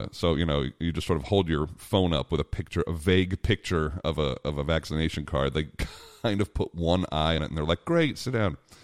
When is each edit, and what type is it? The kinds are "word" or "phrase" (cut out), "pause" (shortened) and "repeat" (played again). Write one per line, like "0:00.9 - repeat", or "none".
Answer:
0:07.4 - word